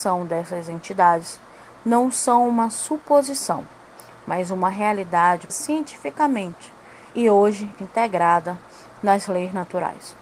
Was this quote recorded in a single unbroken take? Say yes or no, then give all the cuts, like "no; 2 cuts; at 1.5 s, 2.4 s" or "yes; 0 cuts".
no; 3 cuts; at 5.5 s, 7.1 s, 7.8 s